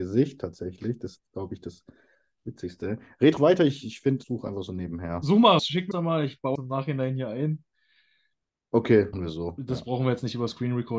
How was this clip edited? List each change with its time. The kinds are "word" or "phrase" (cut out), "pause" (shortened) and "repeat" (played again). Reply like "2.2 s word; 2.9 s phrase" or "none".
3.4 s word; 4.2 s word; 5.6 s word; 5.9 s word; 6.5 s word; 9.1 s word